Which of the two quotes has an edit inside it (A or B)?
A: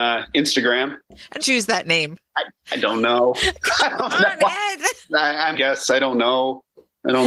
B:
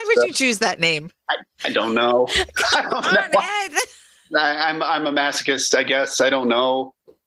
A